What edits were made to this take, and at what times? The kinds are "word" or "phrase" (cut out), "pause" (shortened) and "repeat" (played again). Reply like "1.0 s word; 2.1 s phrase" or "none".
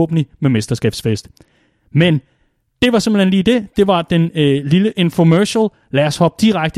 none